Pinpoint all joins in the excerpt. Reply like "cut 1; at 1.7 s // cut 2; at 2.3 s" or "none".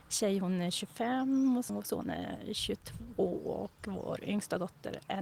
cut 1; at 1.7 s